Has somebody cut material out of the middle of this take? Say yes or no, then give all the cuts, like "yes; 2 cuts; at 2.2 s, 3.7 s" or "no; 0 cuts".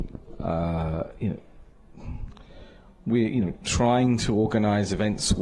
no; 0 cuts